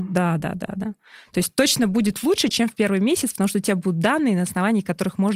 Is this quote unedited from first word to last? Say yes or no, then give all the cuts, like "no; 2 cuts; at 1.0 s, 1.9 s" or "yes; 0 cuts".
yes; 0 cuts